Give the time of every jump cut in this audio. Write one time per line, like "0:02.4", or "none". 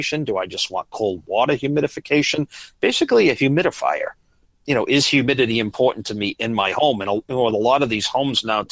none